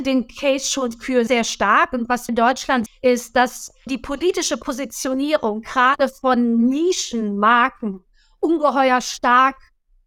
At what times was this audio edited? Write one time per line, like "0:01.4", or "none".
0:01.3
0:02.3
0:02.9
0:03.9